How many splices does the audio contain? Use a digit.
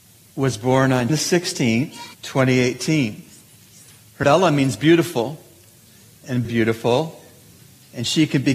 4